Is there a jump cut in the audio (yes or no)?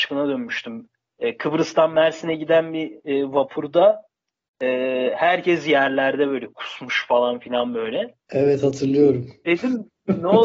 yes